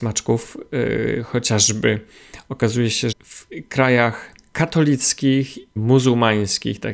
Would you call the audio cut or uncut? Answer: cut